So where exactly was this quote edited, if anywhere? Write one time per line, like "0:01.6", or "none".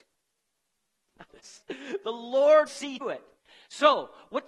0:01.3
0:02.7
0:03.0